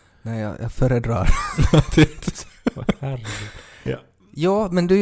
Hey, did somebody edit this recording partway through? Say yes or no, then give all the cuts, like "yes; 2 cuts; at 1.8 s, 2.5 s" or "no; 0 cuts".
yes; 1 cut; at 3.9 s